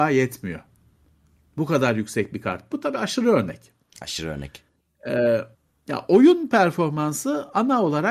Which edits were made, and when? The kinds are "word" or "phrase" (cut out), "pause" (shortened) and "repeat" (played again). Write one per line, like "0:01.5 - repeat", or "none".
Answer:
0:02.7 - word
0:05.5 - pause